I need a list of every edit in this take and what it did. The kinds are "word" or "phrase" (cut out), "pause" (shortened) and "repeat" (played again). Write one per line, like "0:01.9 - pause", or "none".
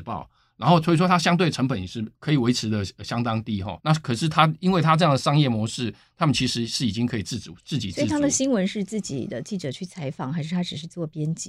0:02.1 - pause
0:03.8 - pause
0:07.6 - pause